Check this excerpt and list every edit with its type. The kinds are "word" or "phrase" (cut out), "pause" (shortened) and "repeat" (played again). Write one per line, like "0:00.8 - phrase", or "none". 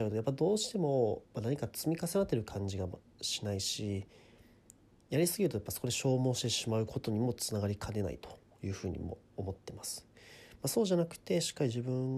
none